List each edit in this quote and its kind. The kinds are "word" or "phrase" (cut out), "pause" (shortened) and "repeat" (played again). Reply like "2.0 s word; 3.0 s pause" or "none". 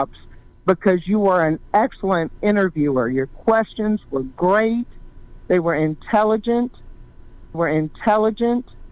7.5 s repeat